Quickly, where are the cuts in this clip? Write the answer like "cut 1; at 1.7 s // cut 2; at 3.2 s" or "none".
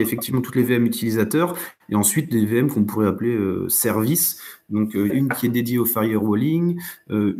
cut 1; at 5.1 s

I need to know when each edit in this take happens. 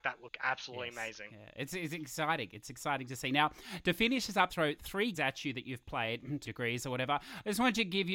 cut 1; at 4.5 s // cut 2; at 5.1 s // cut 3; at 6.4 s

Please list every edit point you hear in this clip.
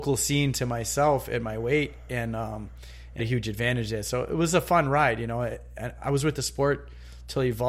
cut 1; at 3.2 s

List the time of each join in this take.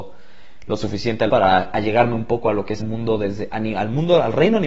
cut 1; at 1.3 s // cut 2; at 2.8 s

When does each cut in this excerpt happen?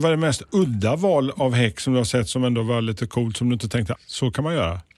cut 1; at 4.0 s

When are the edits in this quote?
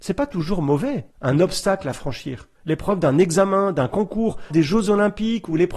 cut 1; at 1.1 s // cut 2; at 2.5 s // cut 3; at 4.5 s

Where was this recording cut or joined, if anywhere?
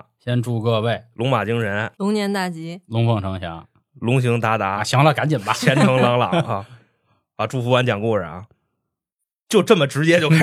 cut 1; at 1.9 s

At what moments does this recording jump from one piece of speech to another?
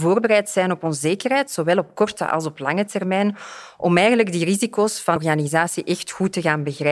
cut 1; at 5.2 s

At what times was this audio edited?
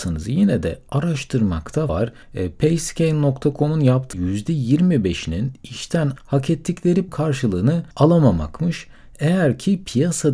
cut 1; at 1.9 s // cut 2; at 2.2 s // cut 3; at 4.1 s // cut 4; at 6.2 s // cut 5; at 7.1 s // cut 6; at 7.9 s

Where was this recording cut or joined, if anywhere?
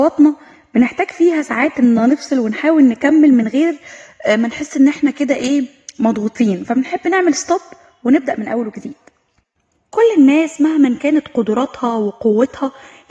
none

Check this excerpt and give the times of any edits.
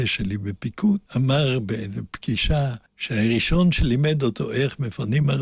cut 1; at 1.1 s // cut 2; at 2.9 s

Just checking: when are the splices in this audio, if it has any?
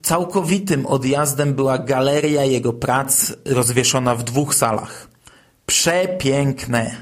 none

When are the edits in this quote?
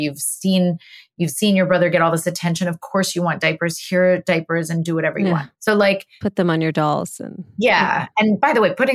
cut 1; at 5.5 s

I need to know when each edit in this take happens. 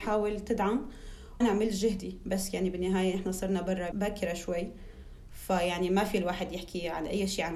cut 1; at 1.4 s // cut 2; at 3.9 s

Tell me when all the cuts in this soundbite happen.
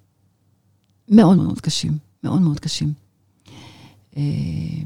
cut 1; at 1.4 s

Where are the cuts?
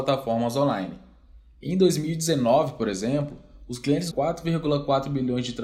cut 1; at 4.1 s

